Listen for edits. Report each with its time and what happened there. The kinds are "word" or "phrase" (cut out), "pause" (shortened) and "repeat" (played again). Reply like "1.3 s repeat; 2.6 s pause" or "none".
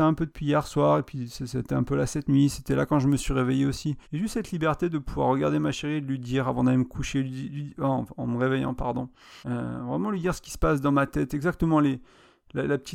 4.0 s pause; 9.4 s pause

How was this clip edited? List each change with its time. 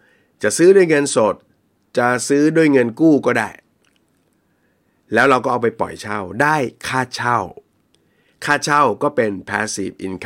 none

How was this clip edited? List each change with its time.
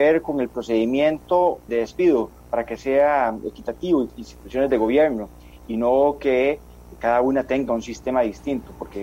1.7 s word; 4.1 s phrase

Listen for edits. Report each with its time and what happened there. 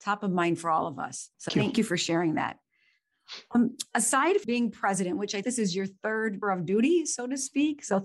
1.5 s word; 4.4 s word; 5.4 s word; 6.4 s word

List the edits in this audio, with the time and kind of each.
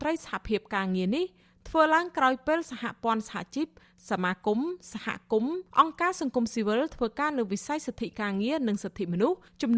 5.7 s pause

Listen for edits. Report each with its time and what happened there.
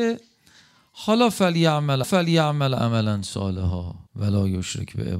2.0 s repeat; 4.1 s pause

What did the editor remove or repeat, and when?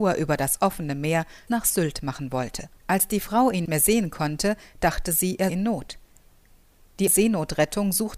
1.5 s word; 2.8 s pause; 3.7 s word; 5.5 s word; 7.1 s word

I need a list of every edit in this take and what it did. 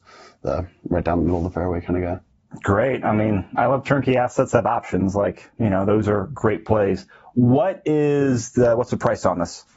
none

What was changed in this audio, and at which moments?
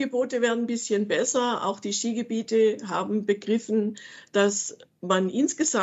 none

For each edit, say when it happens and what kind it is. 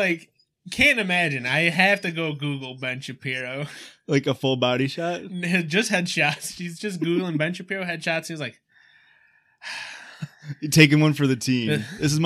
none

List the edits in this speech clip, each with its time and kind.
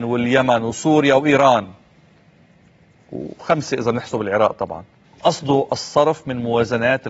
5.1 s word

